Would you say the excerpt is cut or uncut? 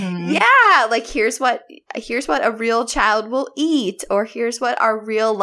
uncut